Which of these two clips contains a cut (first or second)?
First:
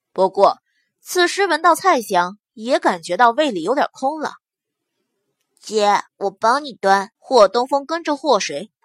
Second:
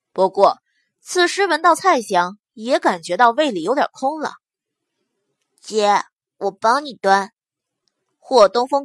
first